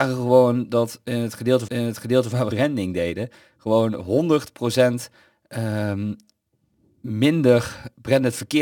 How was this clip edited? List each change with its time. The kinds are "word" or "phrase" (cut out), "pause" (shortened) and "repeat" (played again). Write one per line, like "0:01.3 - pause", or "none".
0:01.7 - repeat
0:02.5 - word